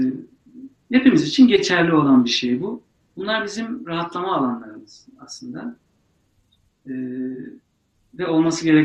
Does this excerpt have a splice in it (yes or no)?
no